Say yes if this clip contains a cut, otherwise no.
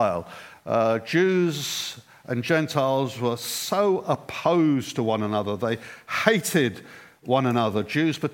no